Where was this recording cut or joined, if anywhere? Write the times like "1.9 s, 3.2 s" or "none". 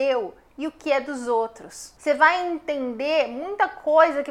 2.0 s

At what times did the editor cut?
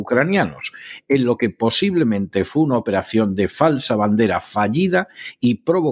none

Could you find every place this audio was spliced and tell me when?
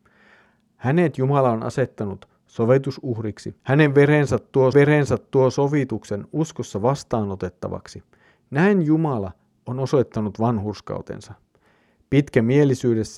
3.6 s, 4.7 s

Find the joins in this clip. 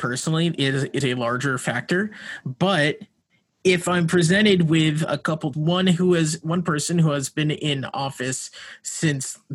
1.0 s, 5.5 s

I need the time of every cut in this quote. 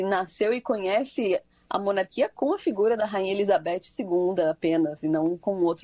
none

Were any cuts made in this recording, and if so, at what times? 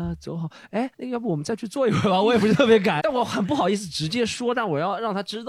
0.9 s, 3.0 s

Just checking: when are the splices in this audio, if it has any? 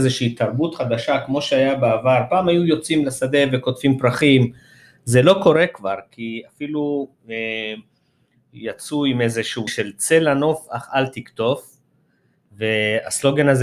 9.7 s

